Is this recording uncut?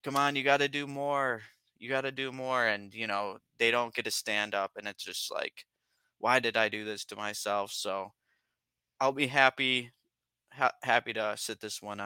yes; 0 cuts

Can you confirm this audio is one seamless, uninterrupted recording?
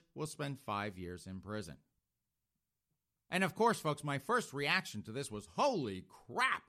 yes; 0 cuts

